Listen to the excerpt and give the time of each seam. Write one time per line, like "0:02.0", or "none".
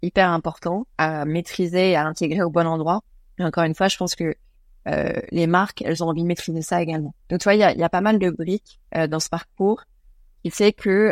0:00.9
0:03.1
0:07.2
0:08.9